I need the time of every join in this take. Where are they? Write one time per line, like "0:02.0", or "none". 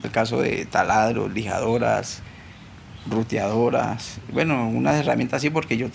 none